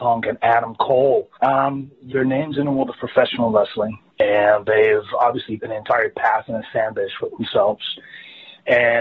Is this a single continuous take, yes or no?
no